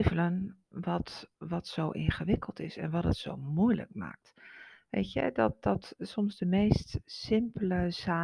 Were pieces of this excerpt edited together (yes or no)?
yes